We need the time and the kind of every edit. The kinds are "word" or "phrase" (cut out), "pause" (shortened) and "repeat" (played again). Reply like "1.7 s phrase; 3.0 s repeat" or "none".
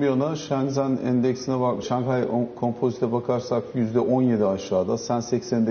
1.8 s word